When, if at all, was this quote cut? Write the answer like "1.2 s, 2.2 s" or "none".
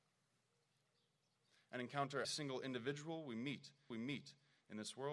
2.2 s, 3.9 s